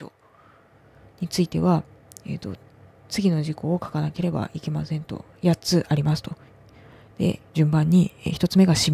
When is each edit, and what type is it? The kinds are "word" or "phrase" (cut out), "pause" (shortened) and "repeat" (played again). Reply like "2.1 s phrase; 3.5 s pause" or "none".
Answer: none